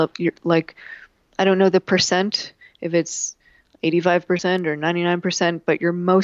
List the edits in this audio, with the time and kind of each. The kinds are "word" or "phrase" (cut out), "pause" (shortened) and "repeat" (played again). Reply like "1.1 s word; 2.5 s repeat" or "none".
none